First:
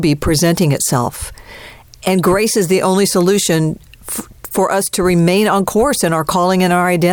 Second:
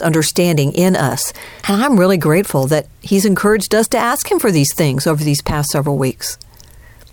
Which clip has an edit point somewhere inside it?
second; 1 cut; at 1.6 s

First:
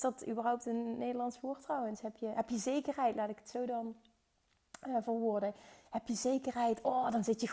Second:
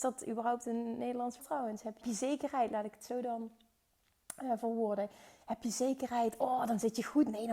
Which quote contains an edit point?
second; 2 cuts; at 1.4 s, 2.0 s

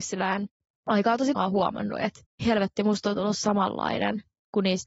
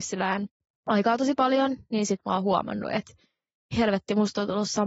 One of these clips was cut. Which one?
first; 2 cuts; at 1.4 s, 2.2 s

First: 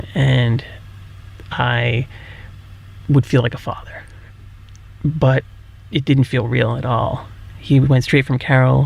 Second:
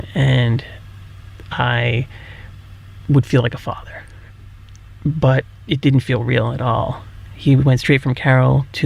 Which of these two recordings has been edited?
second; 1 cut; at 5.5 s

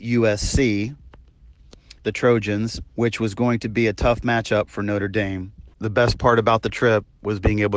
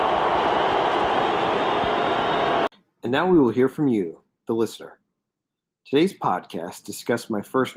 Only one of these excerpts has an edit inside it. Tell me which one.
first; 3 cuts; at 2.0 s, 2.9 s, 5.7 s

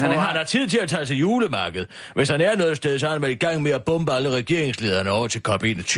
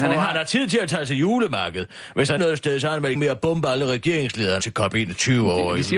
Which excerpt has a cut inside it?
second; 3 cuts; at 2.4 s, 3.1 s, 4.6 s

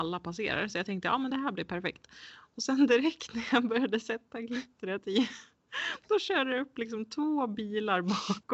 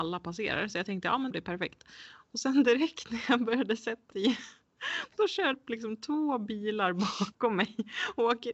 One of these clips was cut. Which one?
second; 3 cuts; at 1.3 s, 4.1 s, 5.5 s

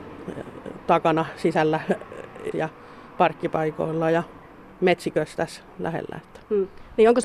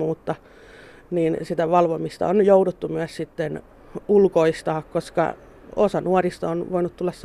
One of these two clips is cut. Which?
first; 2 cuts; at 2.5 s, 4.7 s

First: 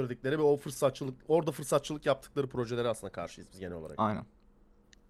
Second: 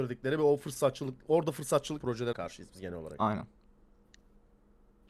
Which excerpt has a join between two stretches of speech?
second; 2 cuts; at 2.0 s, 2.3 s

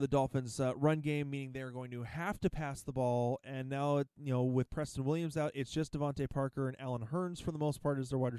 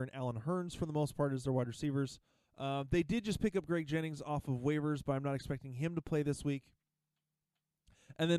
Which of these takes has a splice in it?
second; 1 cut; at 2.3 s

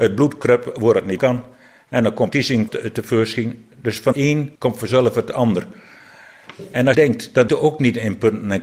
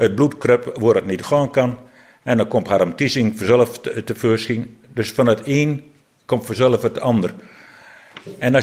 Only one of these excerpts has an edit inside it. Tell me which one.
first; 7 cuts; at 1.2 s, 2.3 s, 2.7 s, 4.1 s, 4.5 s, 6.9 s, 7.5 s

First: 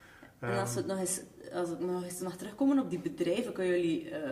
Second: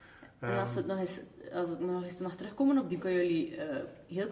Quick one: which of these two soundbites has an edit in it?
second; 1 cut; at 3.0 s

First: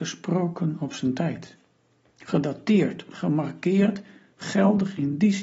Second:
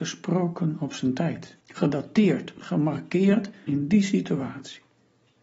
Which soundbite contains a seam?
second; 2 cuts; at 1.6 s, 3.7 s

